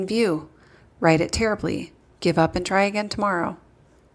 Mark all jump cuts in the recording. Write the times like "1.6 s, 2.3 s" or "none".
2.0 s